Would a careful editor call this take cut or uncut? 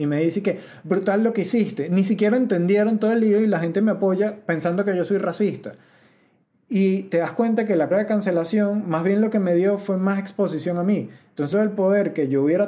cut